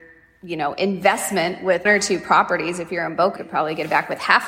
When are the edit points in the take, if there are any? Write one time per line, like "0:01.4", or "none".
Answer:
0:01.9
0:03.4